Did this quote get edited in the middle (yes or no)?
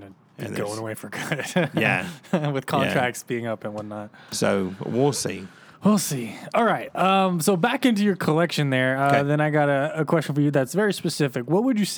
no